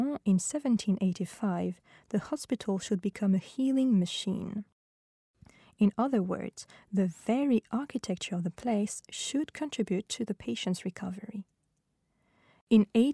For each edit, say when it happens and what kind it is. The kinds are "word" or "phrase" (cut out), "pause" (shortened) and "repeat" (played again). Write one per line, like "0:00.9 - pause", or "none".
none